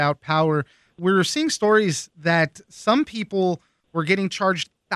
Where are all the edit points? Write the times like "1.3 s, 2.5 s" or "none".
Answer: none